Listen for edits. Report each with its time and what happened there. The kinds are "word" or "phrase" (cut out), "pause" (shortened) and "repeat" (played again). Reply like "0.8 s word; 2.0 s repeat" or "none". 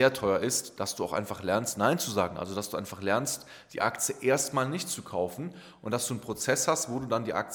none